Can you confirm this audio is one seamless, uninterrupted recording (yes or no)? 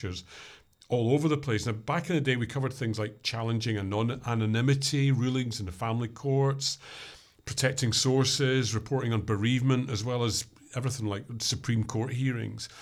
yes